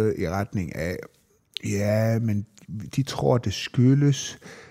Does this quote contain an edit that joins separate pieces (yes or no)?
no